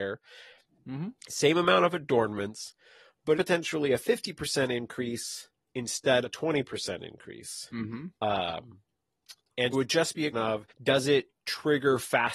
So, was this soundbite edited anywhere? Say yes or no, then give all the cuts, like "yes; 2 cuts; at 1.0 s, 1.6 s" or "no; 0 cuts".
yes; 7 cuts; at 1.2 s, 3.3 s, 6.2 s, 8.1 s, 9.7 s, 10.3 s, 10.7 s